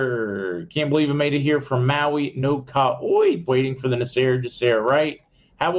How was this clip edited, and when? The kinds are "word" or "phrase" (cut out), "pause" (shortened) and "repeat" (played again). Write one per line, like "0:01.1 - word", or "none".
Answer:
0:03.5 - word